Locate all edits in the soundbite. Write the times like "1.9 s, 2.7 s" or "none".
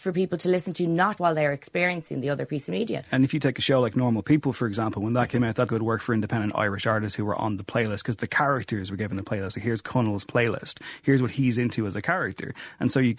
1.2 s, 5.7 s